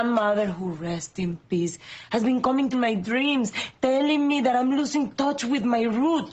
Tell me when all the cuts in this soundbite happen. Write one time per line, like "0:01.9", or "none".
0:02.7